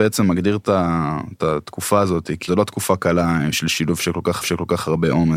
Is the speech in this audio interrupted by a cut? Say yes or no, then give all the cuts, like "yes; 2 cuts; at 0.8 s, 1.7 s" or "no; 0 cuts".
yes; 2 cuts; at 2.5 s, 4.4 s